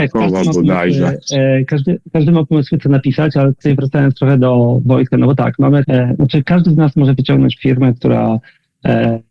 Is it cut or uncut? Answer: cut